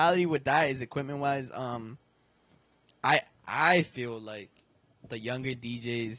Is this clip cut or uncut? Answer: uncut